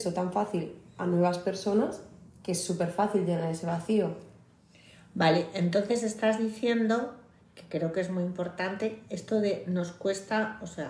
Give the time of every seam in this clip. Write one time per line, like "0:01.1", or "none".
none